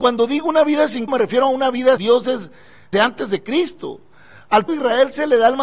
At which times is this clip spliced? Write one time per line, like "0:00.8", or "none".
0:01.1
0:02.0
0:02.9
0:04.7